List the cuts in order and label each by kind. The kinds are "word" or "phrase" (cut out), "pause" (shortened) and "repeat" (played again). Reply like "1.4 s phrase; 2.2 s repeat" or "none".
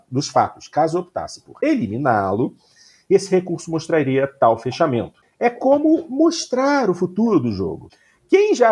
none